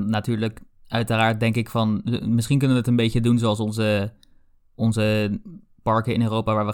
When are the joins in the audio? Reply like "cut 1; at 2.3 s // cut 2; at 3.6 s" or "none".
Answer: none